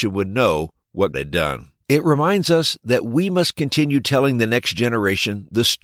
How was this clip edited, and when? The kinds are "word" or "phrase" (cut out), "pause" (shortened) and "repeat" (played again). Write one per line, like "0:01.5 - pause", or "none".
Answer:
0:01.1 - word
0:01.8 - pause